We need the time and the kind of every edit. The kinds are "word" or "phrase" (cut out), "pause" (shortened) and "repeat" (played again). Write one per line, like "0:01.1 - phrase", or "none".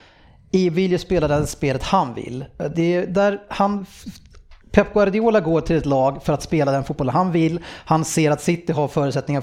0:04.6 - pause